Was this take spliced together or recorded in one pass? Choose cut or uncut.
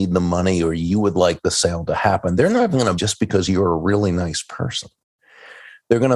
cut